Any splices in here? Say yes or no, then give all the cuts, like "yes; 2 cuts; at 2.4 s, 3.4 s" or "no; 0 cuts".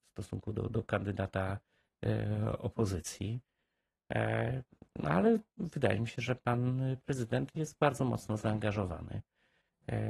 no; 0 cuts